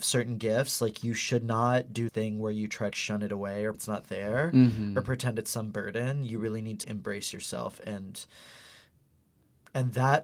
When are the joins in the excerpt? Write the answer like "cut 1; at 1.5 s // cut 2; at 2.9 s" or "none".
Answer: cut 1; at 2.1 s // cut 2; at 2.9 s // cut 3; at 3.7 s // cut 4; at 6.8 s